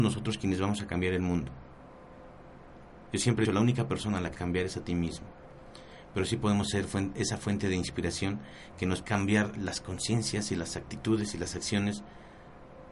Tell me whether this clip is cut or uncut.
cut